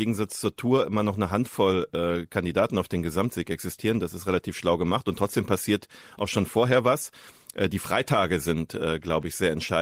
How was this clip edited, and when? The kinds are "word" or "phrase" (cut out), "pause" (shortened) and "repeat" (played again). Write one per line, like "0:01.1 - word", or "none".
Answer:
none